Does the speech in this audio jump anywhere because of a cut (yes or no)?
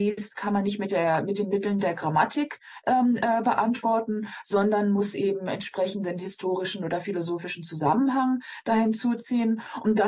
no